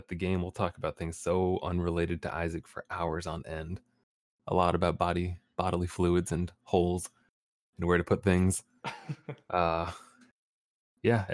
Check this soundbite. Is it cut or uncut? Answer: uncut